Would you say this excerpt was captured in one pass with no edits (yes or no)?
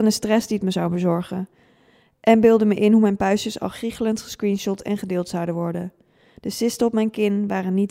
yes